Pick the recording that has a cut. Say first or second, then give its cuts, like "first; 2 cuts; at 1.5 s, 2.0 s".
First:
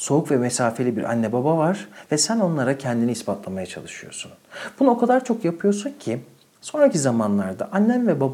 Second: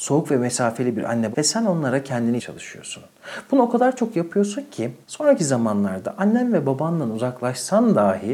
second; 3 cuts; at 1.3 s, 2.4 s, 5.0 s